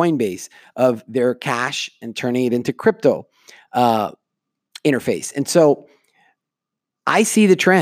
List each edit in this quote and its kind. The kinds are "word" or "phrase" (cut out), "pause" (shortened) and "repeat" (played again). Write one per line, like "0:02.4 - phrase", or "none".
none